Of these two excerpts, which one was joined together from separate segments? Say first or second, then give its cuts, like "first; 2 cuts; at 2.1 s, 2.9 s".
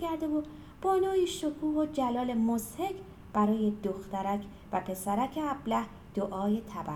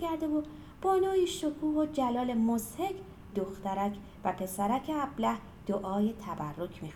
second; 1 cut; at 3.3 s